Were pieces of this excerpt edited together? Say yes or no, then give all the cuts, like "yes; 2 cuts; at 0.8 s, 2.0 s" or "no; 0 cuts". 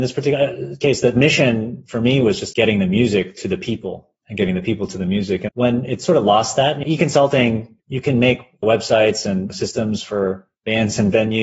yes; 3 cuts; at 2.5 s, 5.5 s, 7.8 s